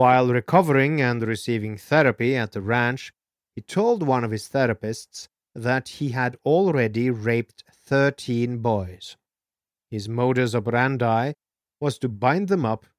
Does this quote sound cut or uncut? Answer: uncut